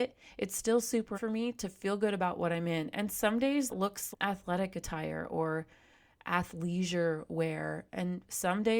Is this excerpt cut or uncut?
cut